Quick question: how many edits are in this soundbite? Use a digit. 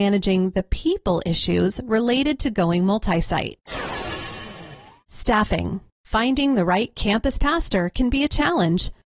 1